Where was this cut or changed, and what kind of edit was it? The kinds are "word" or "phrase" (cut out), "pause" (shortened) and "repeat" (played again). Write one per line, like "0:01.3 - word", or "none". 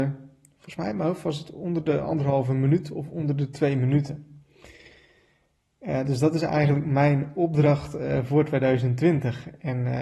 none